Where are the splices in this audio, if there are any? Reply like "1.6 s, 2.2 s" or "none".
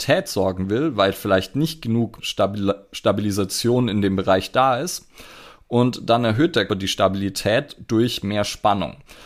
2.2 s, 6.7 s